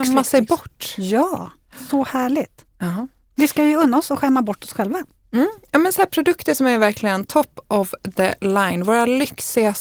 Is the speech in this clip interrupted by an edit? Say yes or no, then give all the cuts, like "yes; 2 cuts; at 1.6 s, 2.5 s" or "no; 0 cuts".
no; 0 cuts